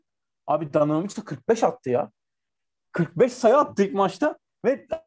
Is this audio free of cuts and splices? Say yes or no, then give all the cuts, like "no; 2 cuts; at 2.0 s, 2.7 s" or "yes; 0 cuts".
yes; 0 cuts